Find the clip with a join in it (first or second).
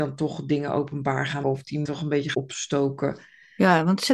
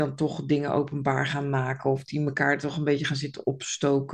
first